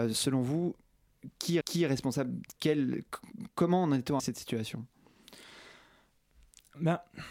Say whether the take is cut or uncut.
cut